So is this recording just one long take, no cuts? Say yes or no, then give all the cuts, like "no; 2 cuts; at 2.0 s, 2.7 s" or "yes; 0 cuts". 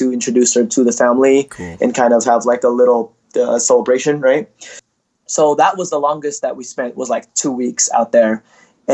no; 1 cut; at 3.2 s